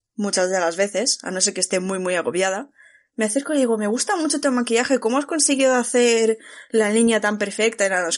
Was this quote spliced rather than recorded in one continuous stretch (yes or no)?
no